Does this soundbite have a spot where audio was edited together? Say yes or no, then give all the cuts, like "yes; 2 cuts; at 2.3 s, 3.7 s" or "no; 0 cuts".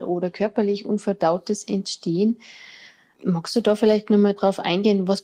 no; 0 cuts